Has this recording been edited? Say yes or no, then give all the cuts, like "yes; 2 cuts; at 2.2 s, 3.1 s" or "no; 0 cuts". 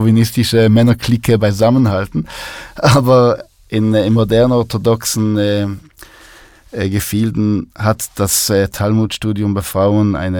no; 0 cuts